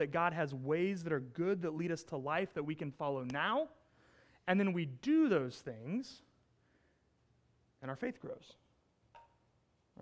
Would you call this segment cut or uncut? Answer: uncut